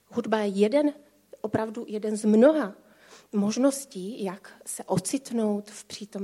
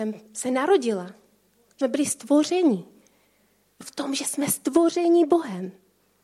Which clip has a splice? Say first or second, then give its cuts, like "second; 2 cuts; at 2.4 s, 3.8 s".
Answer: second; 2 cuts; at 1.8 s, 3.8 s